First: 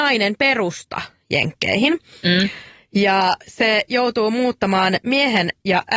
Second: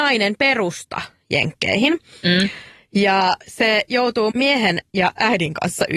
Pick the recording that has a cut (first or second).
second